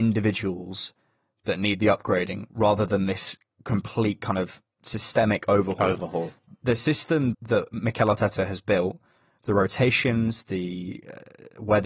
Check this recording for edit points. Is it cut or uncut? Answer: cut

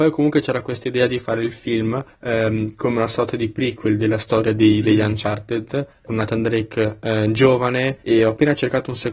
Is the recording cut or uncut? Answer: cut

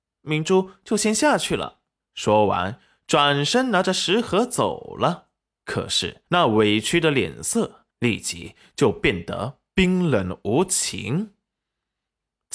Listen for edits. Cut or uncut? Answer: cut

